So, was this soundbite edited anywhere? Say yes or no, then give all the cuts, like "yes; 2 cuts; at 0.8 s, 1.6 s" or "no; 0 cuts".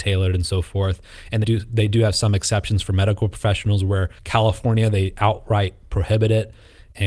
yes; 2 cuts; at 1.4 s, 4.2 s